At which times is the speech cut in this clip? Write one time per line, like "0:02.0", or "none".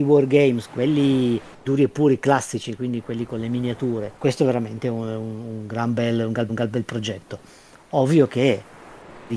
0:01.5
0:04.2
0:06.5